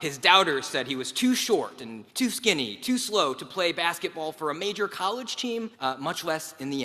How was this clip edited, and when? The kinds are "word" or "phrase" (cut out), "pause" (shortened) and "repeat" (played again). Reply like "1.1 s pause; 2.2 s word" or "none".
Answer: 2.1 s pause; 5.7 s pause